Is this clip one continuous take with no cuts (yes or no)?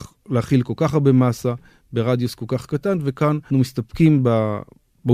no